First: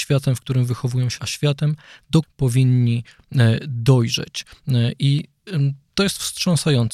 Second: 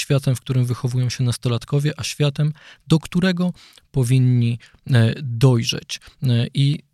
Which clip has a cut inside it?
first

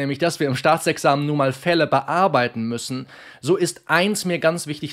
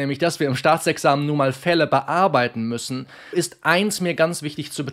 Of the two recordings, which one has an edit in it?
second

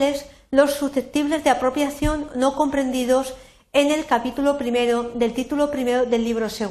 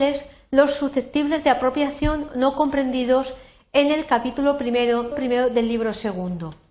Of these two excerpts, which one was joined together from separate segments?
second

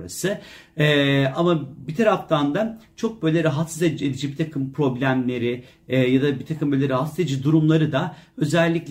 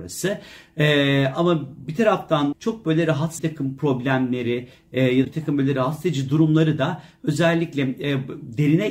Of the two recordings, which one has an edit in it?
second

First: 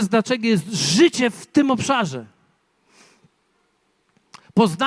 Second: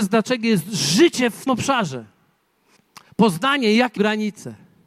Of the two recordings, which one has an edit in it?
second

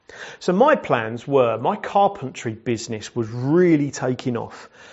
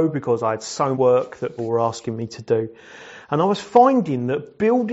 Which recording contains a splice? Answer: second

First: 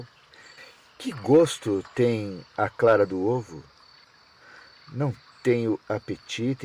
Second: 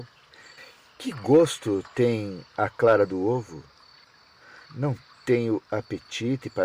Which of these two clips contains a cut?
second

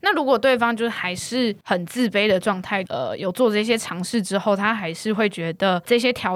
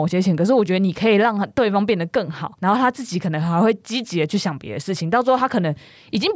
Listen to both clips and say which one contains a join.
first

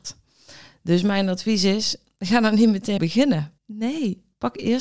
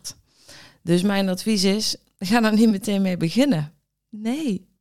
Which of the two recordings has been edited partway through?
first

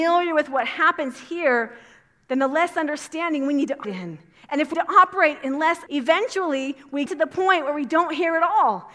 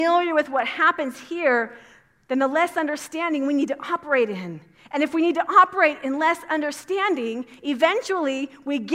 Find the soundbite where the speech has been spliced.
first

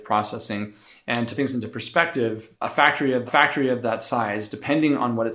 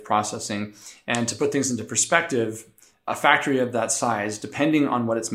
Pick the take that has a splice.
first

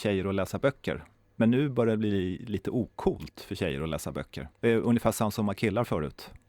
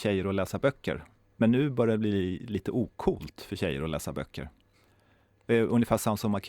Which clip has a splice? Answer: first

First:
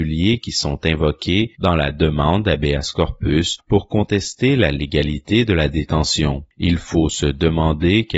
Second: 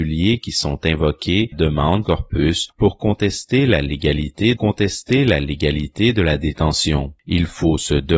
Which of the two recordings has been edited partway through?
second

